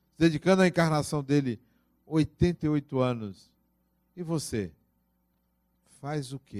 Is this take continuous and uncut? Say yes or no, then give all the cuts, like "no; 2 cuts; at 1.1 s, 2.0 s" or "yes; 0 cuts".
yes; 0 cuts